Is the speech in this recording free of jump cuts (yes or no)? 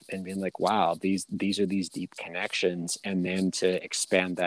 yes